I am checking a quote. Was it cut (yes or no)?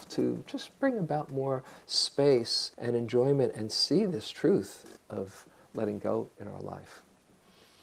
yes